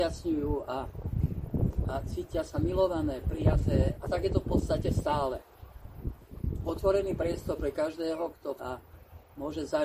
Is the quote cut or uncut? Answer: cut